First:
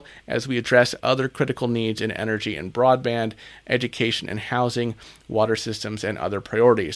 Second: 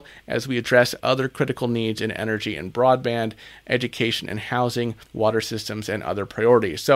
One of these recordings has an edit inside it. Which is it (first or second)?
second